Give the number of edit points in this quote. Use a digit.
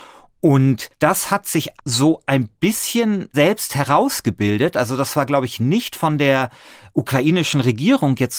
3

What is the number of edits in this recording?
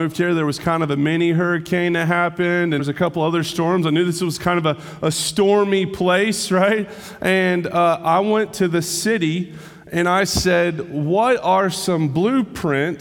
1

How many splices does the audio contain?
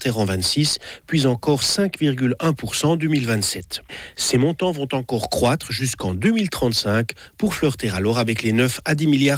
0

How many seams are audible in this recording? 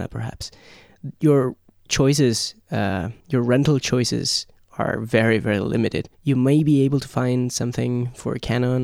2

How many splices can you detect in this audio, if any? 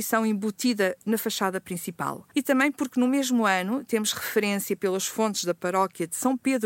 0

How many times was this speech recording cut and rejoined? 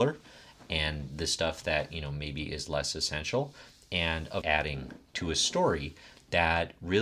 1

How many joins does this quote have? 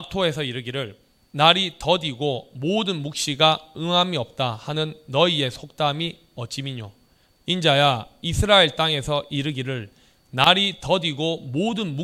0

